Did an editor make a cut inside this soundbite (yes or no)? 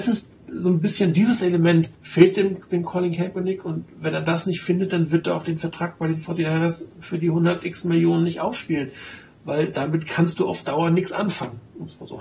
yes